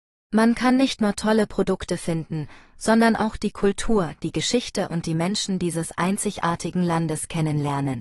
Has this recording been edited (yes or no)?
no